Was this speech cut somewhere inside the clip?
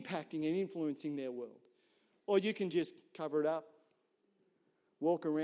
no; 0 cuts

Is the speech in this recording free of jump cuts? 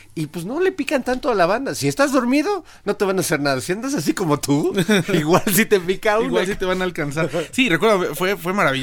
yes; 0 cuts

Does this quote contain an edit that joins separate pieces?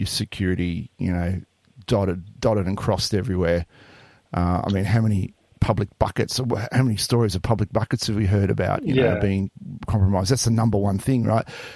no; 0 cuts

